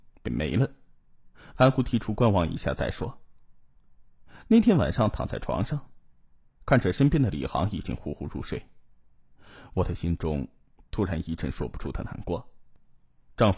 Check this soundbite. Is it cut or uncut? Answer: uncut